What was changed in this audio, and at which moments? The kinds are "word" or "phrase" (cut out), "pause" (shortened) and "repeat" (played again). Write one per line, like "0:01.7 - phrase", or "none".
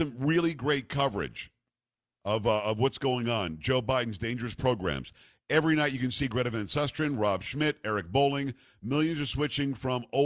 none